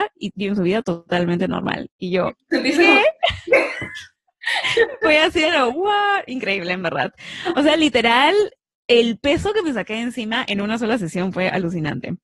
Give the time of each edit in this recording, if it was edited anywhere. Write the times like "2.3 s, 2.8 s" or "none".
none